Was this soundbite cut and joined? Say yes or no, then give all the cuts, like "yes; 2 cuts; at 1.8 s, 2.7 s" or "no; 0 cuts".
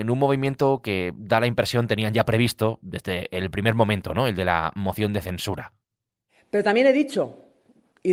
no; 0 cuts